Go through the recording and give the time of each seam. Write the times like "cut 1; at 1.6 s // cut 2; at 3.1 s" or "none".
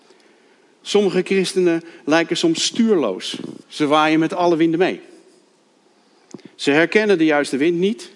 cut 1; at 3.6 s